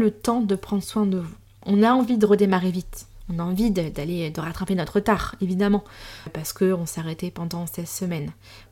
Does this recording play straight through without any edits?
yes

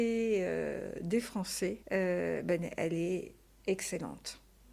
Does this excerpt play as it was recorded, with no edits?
no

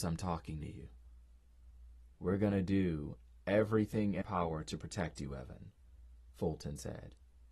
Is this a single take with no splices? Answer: no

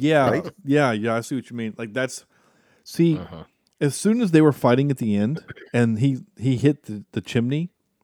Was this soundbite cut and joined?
no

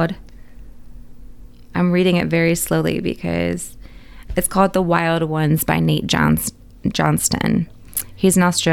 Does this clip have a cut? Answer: no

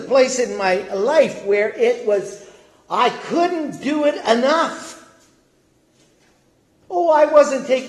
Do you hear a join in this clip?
no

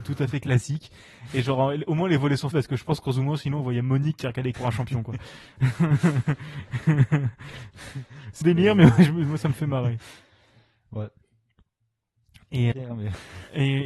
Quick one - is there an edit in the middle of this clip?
yes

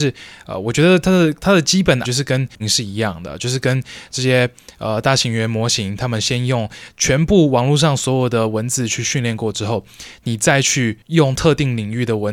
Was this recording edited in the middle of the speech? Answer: yes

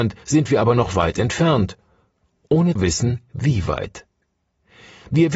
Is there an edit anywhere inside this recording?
yes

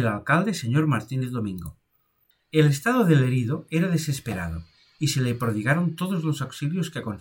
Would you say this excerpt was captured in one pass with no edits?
yes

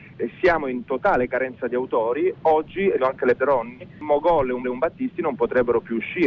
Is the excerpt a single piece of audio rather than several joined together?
no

